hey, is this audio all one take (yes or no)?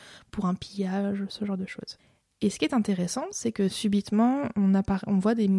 yes